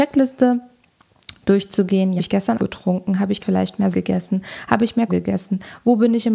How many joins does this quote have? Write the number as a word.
five